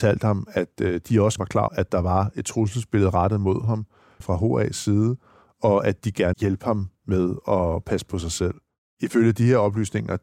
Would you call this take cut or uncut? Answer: cut